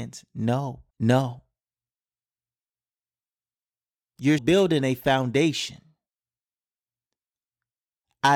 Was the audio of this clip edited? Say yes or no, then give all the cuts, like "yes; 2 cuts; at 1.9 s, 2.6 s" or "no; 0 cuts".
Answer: yes; 2 cuts; at 0.9 s, 4.4 s